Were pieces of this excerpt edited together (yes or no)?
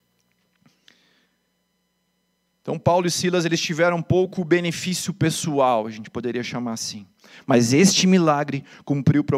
no